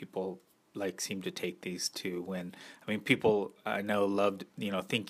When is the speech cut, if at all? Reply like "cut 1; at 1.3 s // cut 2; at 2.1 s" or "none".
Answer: none